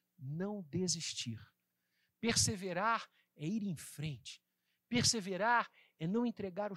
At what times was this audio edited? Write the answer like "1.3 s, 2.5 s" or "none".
none

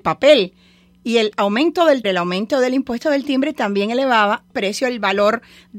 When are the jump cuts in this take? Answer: 2.0 s, 4.5 s

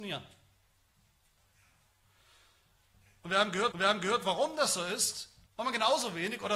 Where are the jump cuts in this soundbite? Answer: 3.7 s, 5.5 s

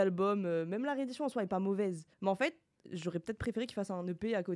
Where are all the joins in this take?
2.1 s

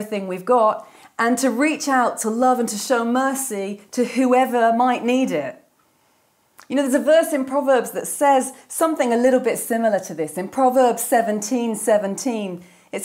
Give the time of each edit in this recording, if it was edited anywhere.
none

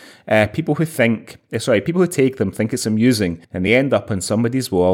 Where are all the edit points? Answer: none

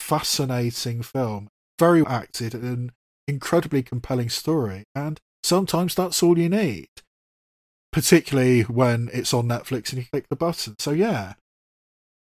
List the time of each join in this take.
2.0 s, 5.3 s, 10.1 s

